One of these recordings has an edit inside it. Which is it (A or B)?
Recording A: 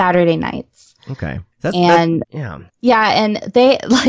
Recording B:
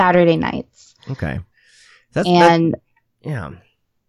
A